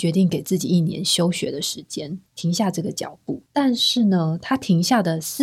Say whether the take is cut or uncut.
cut